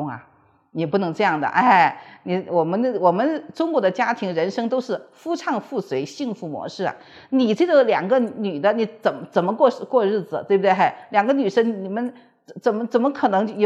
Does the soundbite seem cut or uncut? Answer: uncut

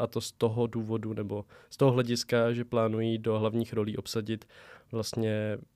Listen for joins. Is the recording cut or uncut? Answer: uncut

